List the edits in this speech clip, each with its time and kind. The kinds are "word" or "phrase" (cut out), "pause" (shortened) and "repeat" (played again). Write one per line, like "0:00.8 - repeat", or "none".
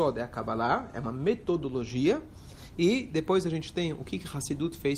none